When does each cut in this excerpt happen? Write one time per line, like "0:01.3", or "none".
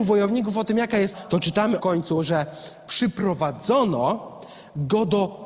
0:01.1
0:01.8